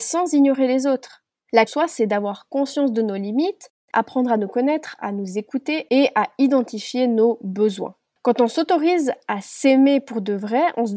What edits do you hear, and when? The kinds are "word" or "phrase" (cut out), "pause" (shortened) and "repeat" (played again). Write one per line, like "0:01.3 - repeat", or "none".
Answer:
0:01.7 - phrase